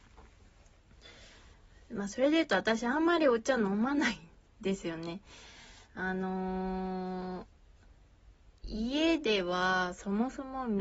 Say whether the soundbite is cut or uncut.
uncut